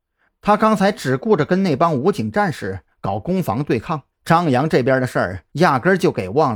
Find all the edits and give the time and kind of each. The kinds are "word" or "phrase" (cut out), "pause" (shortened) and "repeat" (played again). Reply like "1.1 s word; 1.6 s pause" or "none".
4.1 s pause; 5.5 s pause